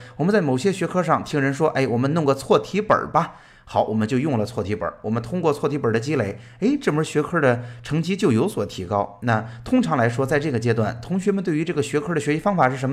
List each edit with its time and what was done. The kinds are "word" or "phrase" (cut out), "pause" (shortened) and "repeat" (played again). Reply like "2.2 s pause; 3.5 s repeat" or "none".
none